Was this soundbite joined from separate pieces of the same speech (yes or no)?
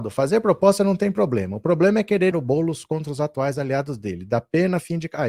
yes